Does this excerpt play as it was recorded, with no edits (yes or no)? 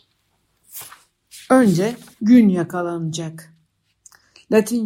no